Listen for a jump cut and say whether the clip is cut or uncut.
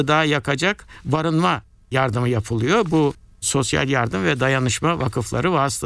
uncut